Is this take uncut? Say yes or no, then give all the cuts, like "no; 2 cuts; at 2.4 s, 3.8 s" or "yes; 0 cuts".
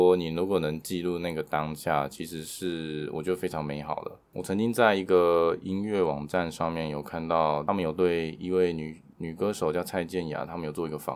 no; 1 cut; at 4.3 s